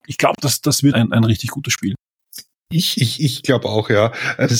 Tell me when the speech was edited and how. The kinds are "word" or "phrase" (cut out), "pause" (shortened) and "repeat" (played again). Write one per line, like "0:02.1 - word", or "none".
0:00.9 - word